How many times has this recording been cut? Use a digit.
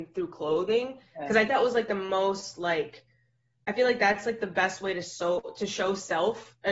1